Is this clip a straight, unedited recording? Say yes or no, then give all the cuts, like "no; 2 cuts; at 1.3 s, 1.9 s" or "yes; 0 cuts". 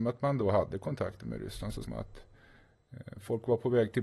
no; 1 cut; at 1.8 s